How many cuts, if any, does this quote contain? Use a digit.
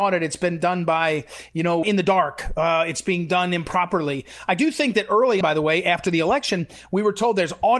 2